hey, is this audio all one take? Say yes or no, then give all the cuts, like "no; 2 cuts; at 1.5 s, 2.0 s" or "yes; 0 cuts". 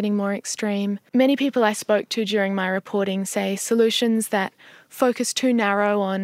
no; 1 cut; at 1.1 s